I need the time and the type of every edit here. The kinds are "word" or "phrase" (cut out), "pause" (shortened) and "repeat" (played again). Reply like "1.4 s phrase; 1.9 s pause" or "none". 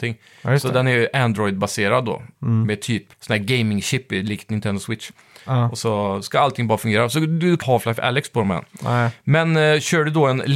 2.3 s pause; 3.1 s pause; 7.6 s phrase